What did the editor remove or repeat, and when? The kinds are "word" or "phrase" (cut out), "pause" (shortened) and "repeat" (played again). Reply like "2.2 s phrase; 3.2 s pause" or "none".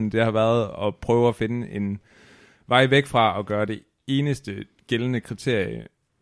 none